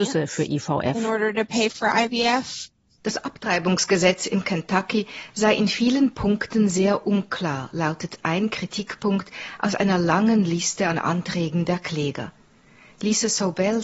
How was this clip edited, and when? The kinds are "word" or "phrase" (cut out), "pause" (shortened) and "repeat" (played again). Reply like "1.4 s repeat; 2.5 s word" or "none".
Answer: none